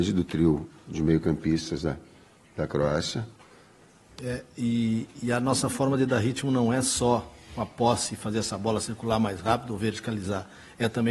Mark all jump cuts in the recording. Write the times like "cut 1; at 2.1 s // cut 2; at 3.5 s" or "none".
none